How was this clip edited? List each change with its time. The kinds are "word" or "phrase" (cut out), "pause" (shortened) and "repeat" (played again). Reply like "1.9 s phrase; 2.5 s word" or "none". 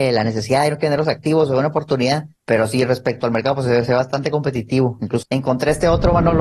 2.4 s pause; 5.2 s phrase

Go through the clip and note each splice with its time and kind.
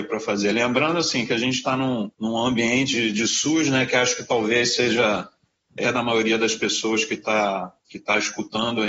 2.1 s pause; 2.9 s word; 5.8 s phrase

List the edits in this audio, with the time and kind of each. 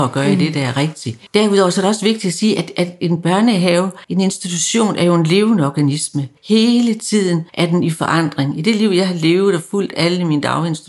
1.3 s pause; 4.0 s pause; 6.4 s pause; 7.5 s pause

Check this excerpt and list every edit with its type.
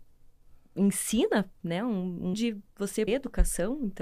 2.3 s word; 3.1 s word

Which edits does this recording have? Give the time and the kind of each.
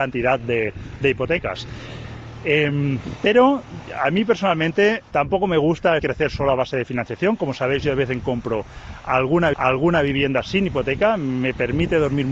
5.1 s word; 6.0 s phrase; 8.2 s word; 9.5 s repeat

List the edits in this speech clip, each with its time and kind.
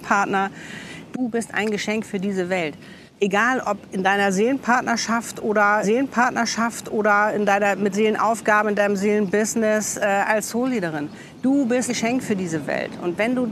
3.1 s pause; 5.8 s repeat; 7.9 s word; 11.9 s word

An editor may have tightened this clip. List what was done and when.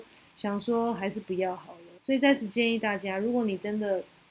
2.0 s pause

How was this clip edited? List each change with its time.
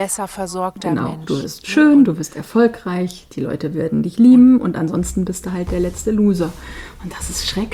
none

